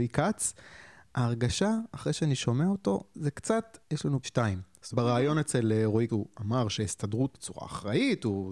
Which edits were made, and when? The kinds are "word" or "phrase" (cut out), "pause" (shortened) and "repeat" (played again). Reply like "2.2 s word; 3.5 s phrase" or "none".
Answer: 3.8 s pause; 4.2 s phrase; 4.9 s word; 6.1 s word; 7.3 s word

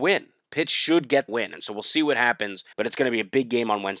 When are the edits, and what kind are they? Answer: 1.3 s word; 2.7 s pause

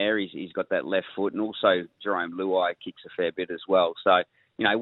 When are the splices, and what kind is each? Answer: none

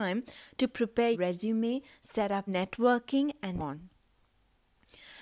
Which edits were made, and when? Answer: 1.1 s word; 2.5 s phrase; 3.6 s word

